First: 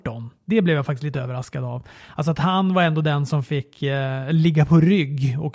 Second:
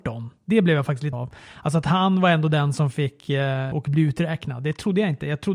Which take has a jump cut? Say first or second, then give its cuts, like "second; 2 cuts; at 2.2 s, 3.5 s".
second; 2 cuts; at 1.1 s, 3.7 s